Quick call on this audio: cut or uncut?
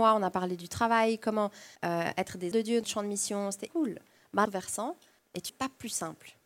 cut